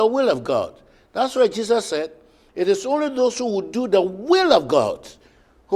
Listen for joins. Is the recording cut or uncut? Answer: uncut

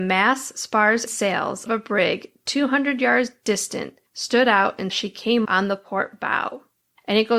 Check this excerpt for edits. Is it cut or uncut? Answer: cut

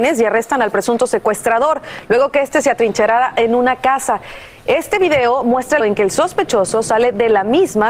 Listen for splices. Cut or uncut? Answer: cut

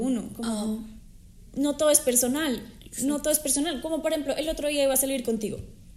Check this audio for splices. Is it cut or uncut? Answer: uncut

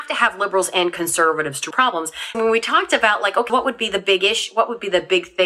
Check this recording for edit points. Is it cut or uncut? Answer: cut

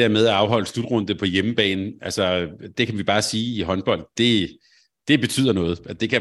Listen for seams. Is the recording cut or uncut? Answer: uncut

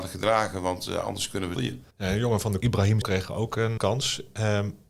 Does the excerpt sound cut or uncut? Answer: cut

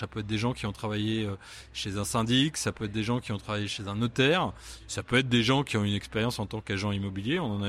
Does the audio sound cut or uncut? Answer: uncut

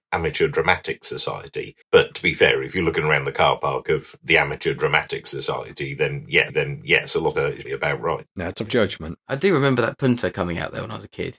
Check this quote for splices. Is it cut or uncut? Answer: cut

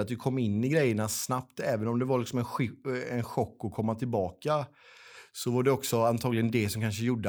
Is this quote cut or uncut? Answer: uncut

